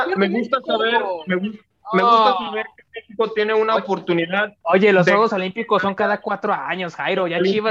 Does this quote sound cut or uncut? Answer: uncut